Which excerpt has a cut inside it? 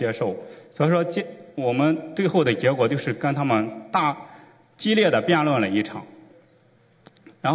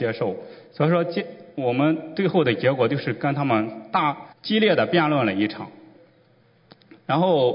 second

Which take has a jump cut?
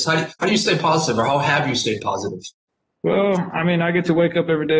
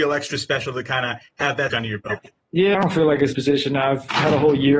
second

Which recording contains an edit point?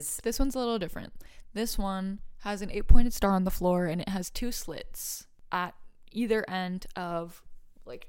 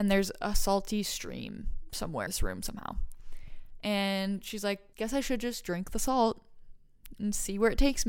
second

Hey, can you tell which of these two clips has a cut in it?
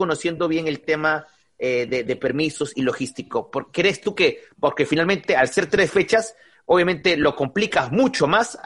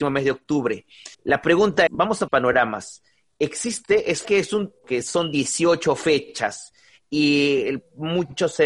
second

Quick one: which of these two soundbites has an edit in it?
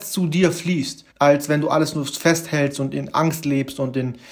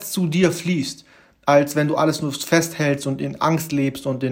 first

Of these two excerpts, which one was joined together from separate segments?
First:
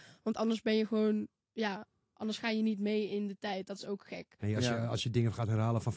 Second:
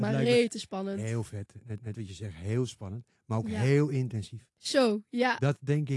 second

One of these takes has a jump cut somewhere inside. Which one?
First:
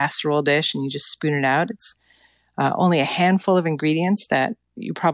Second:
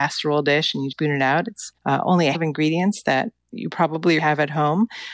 second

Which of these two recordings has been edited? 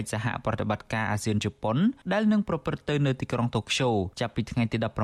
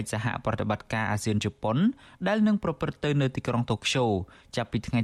first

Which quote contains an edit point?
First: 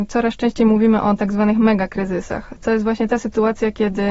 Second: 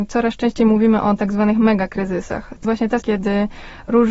second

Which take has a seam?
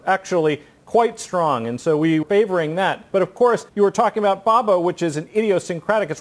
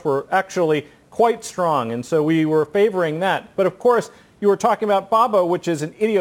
first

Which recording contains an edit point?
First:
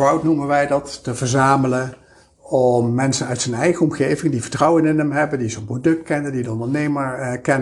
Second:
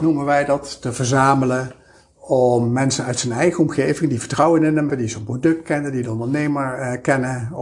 second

